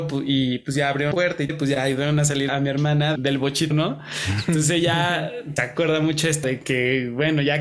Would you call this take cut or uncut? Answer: cut